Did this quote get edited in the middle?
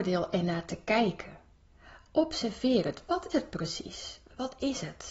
yes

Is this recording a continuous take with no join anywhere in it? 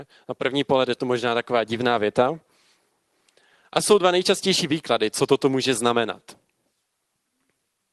yes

